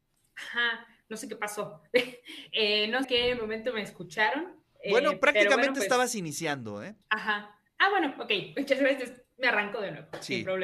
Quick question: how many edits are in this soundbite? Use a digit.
2